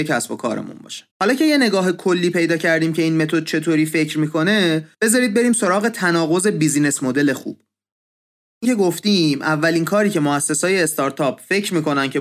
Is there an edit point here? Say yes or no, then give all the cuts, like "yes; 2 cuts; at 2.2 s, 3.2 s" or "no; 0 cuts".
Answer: yes; 3 cuts; at 1.1 s, 4.9 s, 8.6 s